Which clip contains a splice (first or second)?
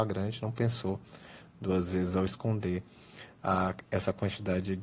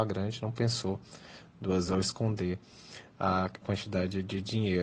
second